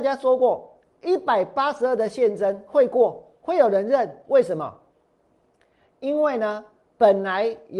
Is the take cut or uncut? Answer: cut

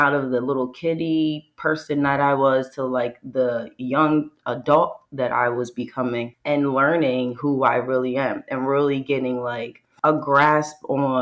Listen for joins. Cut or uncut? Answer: uncut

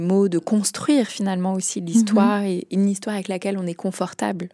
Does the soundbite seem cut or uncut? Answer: uncut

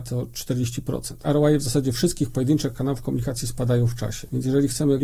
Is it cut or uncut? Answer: uncut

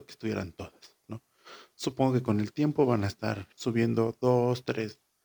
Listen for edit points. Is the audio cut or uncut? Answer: cut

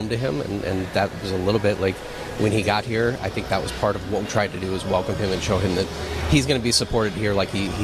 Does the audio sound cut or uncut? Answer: cut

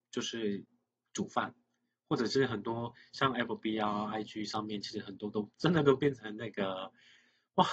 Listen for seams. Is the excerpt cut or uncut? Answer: uncut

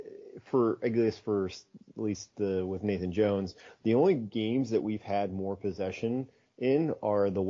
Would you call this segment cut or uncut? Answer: uncut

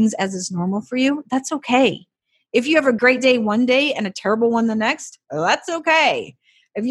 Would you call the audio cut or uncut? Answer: uncut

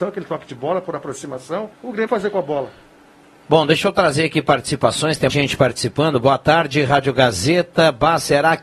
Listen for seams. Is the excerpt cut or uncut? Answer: cut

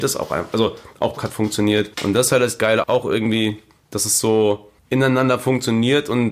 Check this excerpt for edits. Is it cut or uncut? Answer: cut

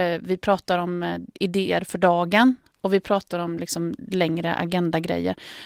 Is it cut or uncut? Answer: uncut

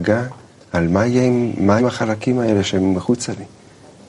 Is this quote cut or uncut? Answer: cut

